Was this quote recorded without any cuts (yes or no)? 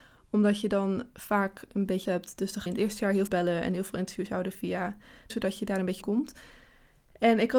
no